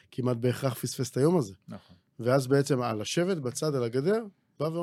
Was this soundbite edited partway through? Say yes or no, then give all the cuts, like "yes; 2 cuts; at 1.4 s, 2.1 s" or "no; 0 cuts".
no; 0 cuts